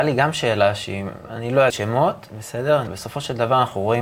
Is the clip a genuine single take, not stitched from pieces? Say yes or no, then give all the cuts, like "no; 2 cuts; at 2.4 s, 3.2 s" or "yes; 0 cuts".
no; 2 cuts; at 1.7 s, 2.9 s